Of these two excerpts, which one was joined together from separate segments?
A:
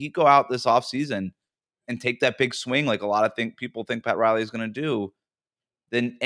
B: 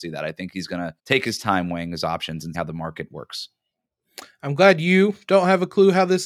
B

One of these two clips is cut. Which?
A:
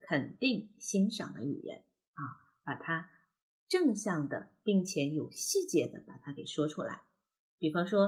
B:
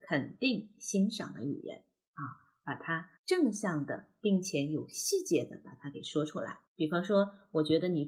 B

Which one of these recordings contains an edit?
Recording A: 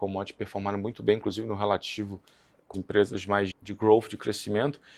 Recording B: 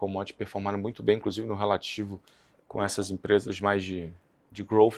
A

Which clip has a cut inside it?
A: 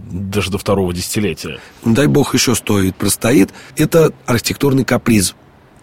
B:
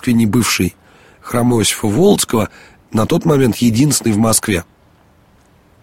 A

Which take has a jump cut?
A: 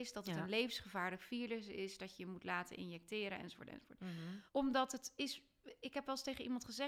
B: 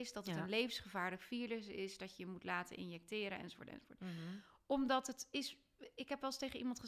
A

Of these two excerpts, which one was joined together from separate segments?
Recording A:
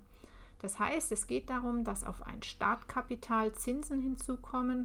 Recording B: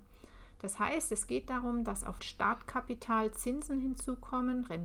B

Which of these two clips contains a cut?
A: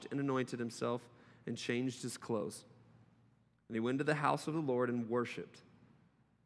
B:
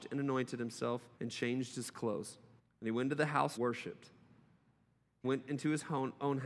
B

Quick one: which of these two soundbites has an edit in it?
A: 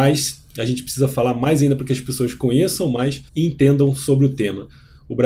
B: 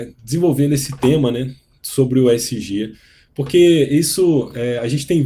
A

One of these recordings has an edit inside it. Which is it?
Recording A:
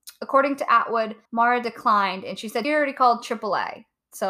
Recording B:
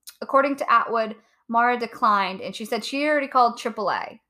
A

